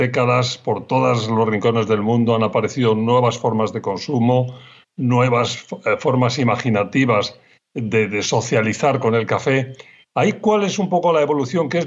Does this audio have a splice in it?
no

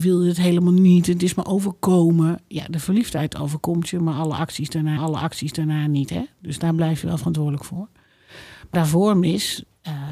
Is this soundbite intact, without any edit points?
no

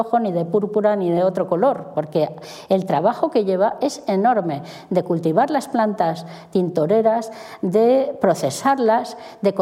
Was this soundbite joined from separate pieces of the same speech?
no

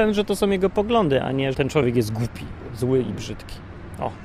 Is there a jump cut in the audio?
yes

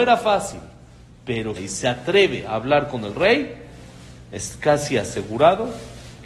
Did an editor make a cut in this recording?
yes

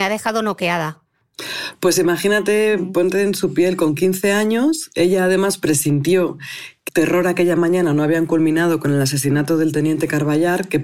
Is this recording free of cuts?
no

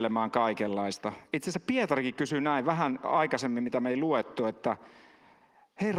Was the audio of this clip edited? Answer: no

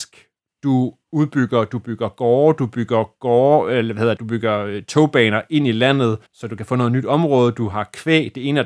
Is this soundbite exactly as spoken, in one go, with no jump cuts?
no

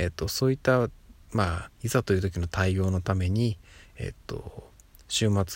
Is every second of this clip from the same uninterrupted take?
no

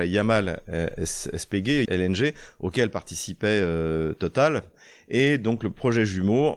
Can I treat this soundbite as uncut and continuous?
no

